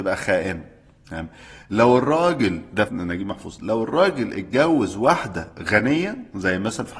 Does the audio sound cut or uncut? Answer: cut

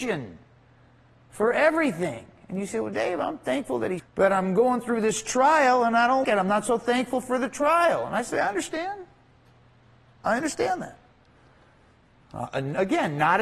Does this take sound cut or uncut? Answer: cut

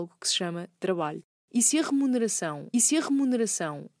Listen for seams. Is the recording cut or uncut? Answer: cut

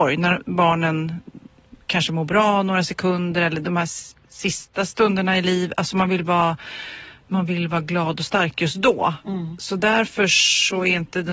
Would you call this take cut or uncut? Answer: uncut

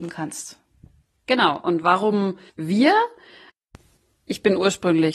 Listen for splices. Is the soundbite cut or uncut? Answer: cut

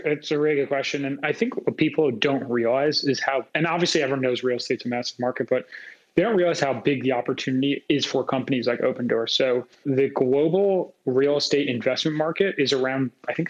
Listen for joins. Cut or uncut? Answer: cut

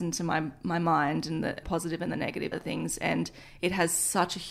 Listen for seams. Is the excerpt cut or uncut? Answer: cut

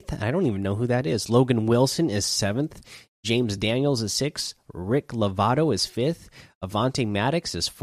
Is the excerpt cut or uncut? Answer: uncut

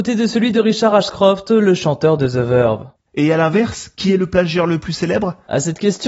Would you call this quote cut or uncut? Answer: uncut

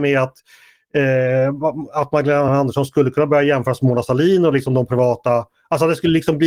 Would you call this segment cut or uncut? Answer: uncut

